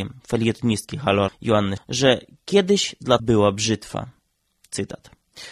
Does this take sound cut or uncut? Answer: cut